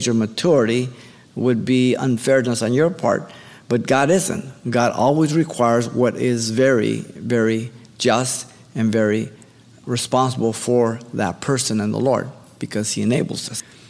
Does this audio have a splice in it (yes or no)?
no